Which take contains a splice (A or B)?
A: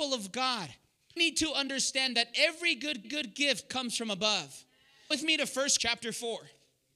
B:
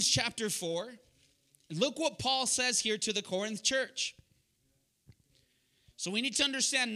A